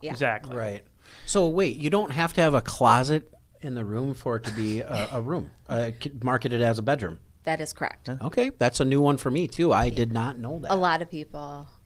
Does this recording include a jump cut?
no; 0 cuts

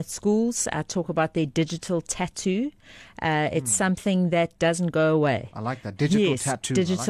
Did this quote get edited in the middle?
no; 0 cuts

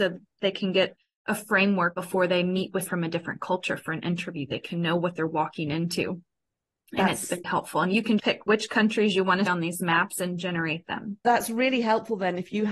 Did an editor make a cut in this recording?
yes; 5 cuts; at 2.9 s, 7.4 s, 8.2 s, 9.5 s, 11.2 s

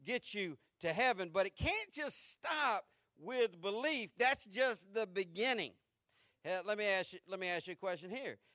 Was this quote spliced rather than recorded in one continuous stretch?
no; 0 cuts

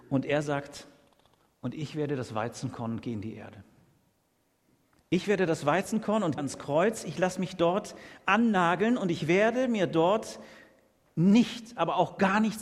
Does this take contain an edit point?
yes; 1 cut; at 6.4 s

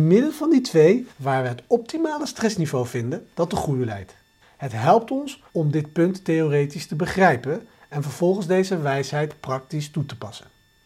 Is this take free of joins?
no; 3 cuts; at 1.1 s, 4.4 s, 5.5 s

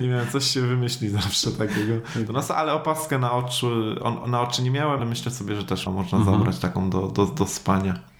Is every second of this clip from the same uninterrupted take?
no; 2 cuts; at 5.0 s, 5.9 s

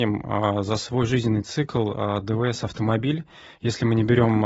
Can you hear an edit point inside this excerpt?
no; 0 cuts

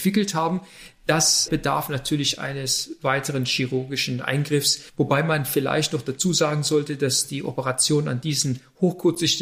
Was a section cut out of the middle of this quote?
yes; 2 cuts; at 1.5 s, 4.9 s

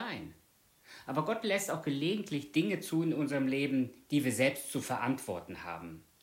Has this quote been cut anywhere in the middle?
no; 0 cuts

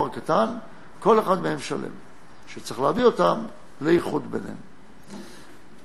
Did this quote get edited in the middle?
no; 0 cuts

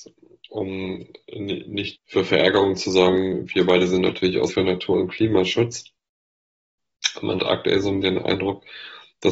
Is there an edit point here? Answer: yes; 4 cuts; at 1.9 s, 4.5 s, 7.4 s, 8.0 s

